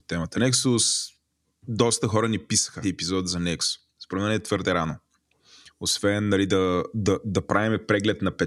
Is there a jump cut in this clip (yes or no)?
yes